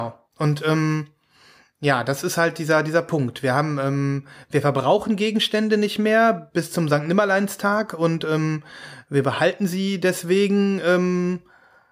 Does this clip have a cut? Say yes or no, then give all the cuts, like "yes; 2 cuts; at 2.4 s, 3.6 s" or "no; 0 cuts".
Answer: no; 0 cuts